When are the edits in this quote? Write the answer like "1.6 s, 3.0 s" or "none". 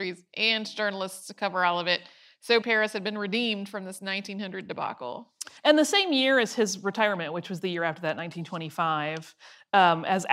2.6 s, 5.6 s